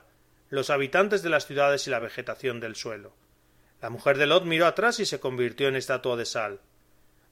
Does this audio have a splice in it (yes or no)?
no